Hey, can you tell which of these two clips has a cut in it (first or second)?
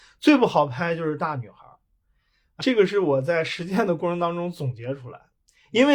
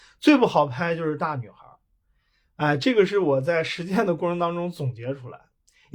first